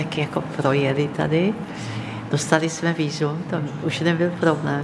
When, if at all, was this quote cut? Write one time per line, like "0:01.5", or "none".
none